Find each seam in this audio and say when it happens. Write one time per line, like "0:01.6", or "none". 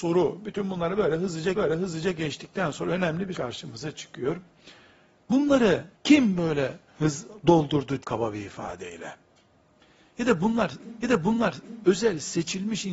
0:01.5
0:03.3
0:05.9
0:06.9
0:08.0
0:11.0